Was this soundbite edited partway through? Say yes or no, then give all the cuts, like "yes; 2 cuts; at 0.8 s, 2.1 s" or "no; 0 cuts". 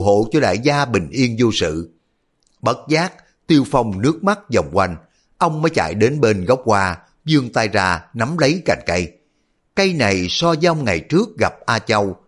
no; 0 cuts